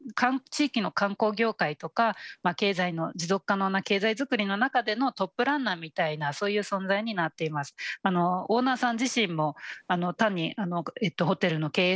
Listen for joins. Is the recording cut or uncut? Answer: uncut